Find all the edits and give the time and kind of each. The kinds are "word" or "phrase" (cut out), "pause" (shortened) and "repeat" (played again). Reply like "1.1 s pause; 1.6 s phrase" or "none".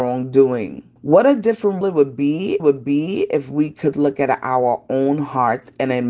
1.0 s pause; 1.8 s word; 2.6 s repeat; 3.9 s word